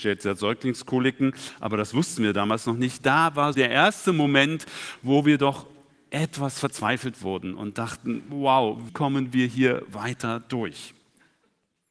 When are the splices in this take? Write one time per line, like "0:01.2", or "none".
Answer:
0:03.5
0:08.9